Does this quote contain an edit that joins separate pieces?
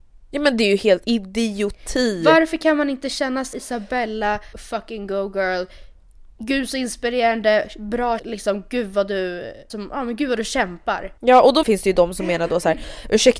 yes; 7 cuts; at 1.0 s, 3.5 s, 4.5 s, 8.2 s, 9.7 s, 11.2 s, 11.6 s

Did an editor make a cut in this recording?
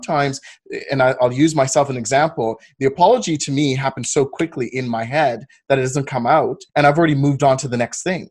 yes; 1 cut; at 6.7 s

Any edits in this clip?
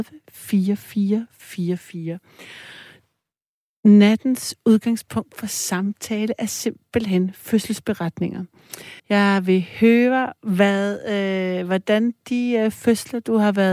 yes; 1 cut; at 9.0 s

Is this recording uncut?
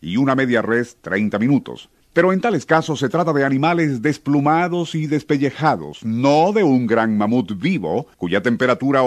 no; 2 cuts; at 2.0 s, 8.1 s

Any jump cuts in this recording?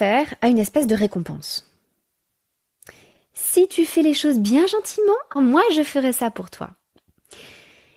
yes; 1 cut; at 5.4 s

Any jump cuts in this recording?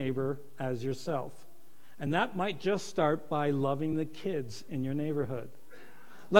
no; 0 cuts

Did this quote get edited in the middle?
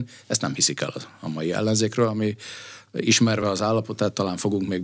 no; 0 cuts

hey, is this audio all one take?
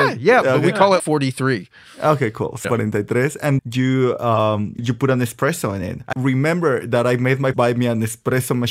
no; 6 cuts; at 1.0 s, 2.6 s, 3.6 s, 4.8 s, 6.1 s, 7.5 s

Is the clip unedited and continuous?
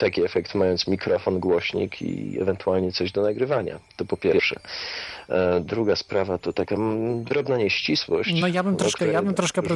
yes; 0 cuts

